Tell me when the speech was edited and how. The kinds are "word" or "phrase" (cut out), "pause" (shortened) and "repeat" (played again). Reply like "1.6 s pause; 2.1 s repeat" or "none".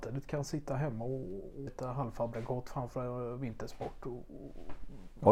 1.7 s word